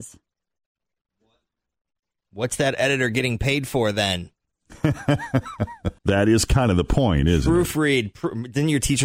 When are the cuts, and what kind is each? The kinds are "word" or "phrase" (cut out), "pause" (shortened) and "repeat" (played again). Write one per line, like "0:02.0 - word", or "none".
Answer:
0:06.0 - pause